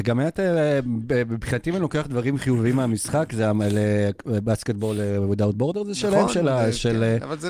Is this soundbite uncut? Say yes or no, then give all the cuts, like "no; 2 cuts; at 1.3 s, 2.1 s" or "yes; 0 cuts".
yes; 0 cuts